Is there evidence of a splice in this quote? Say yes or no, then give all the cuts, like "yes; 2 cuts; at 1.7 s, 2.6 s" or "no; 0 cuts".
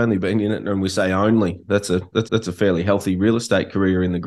yes; 1 cut; at 2.3 s